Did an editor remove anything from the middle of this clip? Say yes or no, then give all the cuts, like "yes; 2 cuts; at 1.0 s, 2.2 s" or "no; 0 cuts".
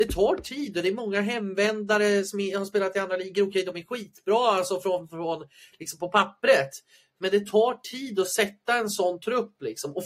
no; 0 cuts